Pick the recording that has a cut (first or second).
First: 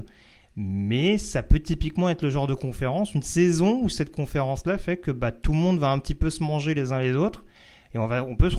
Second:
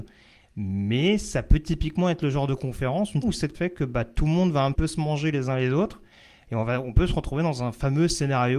second